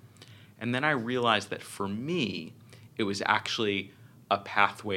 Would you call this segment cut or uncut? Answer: uncut